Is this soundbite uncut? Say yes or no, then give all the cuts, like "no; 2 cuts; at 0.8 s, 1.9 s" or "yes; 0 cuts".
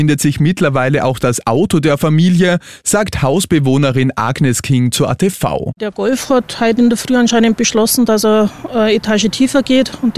yes; 0 cuts